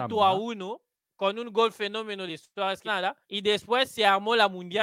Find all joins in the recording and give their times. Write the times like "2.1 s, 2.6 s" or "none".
1.0 s, 2.3 s, 2.9 s, 3.2 s